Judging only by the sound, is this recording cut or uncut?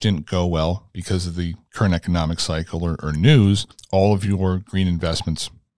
cut